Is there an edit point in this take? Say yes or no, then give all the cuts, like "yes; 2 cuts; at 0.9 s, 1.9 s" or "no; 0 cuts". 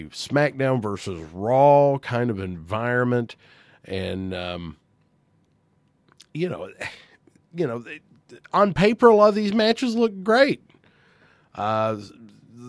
no; 0 cuts